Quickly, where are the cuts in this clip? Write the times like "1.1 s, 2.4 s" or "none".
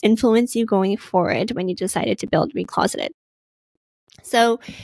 none